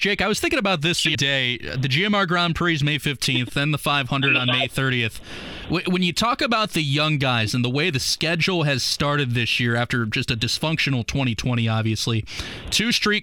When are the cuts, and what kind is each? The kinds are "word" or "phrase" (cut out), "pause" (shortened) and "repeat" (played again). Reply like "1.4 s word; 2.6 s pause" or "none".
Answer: 1.1 s word